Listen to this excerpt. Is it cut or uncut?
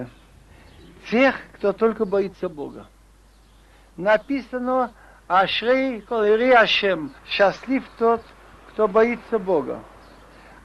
cut